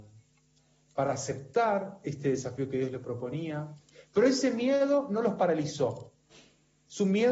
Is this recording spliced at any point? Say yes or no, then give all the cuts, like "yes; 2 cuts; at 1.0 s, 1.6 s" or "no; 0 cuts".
no; 0 cuts